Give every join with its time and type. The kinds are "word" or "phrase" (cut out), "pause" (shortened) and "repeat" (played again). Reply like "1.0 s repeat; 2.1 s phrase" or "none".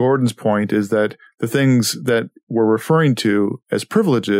none